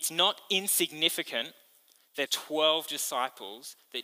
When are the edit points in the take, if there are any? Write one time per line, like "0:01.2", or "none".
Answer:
0:02.3